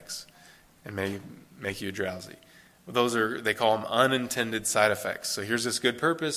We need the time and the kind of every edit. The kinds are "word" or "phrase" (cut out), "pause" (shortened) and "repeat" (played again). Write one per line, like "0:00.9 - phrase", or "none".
none